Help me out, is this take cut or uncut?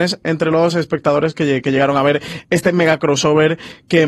uncut